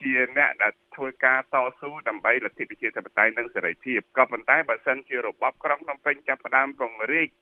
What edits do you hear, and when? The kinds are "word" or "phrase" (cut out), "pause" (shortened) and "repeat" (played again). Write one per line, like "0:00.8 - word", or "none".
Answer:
0:04.1 - pause

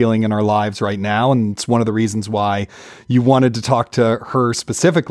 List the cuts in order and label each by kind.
none

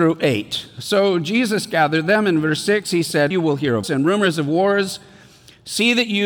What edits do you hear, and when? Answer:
0:03.3 - word
0:03.8 - word

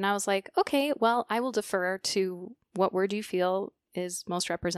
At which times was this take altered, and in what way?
0:02.6 - pause

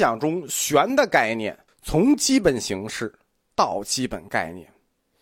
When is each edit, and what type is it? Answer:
0:01.7 - pause

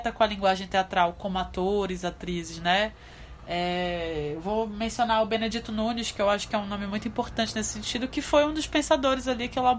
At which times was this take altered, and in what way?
none

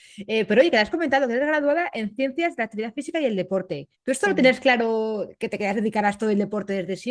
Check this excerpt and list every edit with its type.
0:03.9 - pause

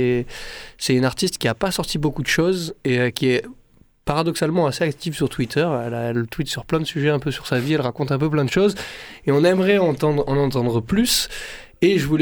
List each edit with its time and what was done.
none

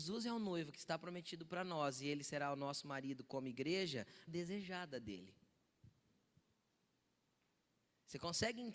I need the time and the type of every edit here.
0:04.3 - phrase

